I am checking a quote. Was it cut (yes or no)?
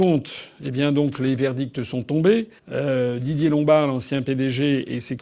yes